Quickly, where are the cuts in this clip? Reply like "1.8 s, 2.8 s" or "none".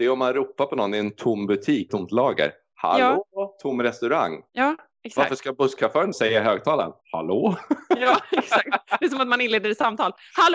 1.9 s, 4.5 s, 6.1 s, 7.0 s